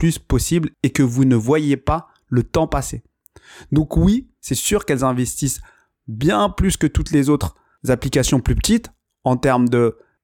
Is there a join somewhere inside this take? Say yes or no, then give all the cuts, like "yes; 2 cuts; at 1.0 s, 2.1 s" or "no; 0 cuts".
no; 0 cuts